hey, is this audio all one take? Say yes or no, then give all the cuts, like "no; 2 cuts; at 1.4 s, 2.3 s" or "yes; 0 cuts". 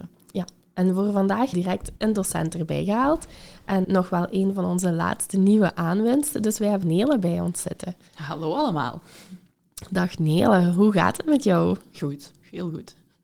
no; 4 cuts; at 1.5 s, 2.0 s, 3.8 s, 6.8 s